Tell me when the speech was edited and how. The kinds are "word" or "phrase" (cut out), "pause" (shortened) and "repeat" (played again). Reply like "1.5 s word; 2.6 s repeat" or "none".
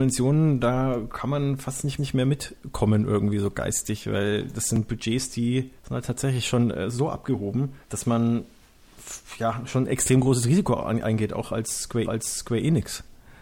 2.0 s repeat; 5.8 s pause; 7.8 s pause; 12.0 s repeat